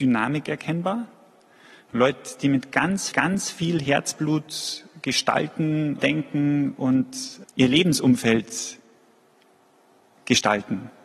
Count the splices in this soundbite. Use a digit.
3